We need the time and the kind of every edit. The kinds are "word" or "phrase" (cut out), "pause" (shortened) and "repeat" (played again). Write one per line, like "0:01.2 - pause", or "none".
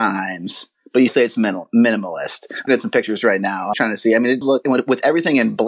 0:01.1 - word
0:02.7 - word
0:03.7 - word
0:04.4 - word